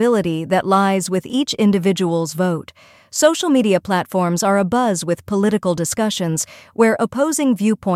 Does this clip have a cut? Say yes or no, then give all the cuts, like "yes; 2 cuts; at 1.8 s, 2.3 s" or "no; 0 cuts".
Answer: no; 0 cuts